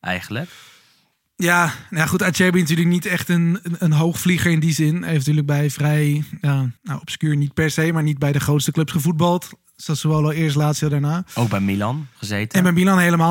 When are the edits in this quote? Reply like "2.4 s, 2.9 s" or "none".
6.8 s